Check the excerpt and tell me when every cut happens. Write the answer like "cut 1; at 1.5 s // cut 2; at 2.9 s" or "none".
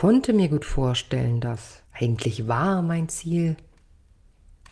cut 1; at 1.8 s